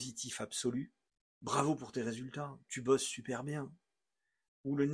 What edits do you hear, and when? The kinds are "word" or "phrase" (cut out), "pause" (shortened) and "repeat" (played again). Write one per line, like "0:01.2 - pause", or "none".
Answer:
0:01.1 - pause